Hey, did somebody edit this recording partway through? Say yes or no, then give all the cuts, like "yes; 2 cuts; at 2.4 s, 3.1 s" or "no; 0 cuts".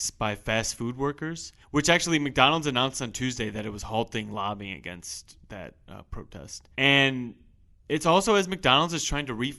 yes; 2 cuts; at 1.6 s, 6.7 s